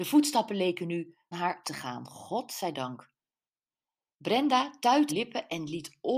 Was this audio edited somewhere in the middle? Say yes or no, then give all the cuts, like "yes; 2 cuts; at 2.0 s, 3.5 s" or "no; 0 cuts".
yes; 3 cuts; at 1.3 s, 1.6 s, 5.1 s